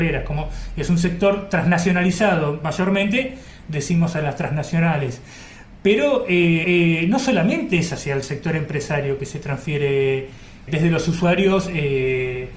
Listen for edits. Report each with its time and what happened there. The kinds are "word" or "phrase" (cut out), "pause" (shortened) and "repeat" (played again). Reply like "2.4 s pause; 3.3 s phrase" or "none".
6.6 s repeat; 10.7 s word